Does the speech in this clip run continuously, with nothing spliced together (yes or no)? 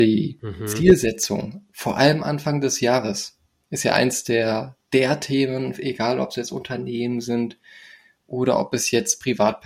yes